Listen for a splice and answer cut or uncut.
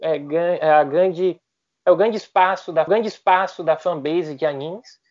cut